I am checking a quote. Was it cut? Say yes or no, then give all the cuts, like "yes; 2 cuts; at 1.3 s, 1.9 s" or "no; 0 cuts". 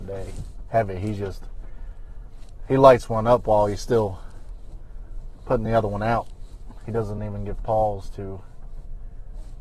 no; 0 cuts